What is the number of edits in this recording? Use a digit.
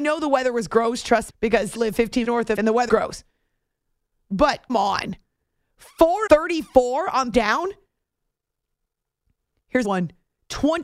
9